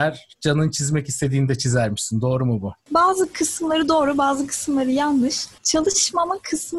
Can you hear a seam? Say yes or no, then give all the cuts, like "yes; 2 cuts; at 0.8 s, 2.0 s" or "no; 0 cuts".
yes; 1 cut; at 5.6 s